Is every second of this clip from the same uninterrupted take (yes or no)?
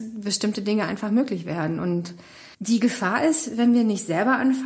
no